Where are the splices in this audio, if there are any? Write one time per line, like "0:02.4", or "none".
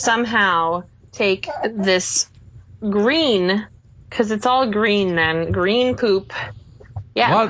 0:03.8